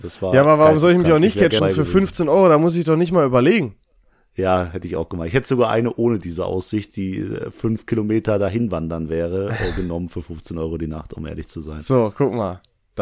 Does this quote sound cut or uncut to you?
cut